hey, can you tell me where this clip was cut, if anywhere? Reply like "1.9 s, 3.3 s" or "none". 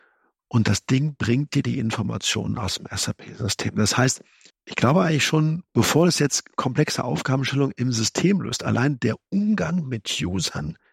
4.5 s, 5.7 s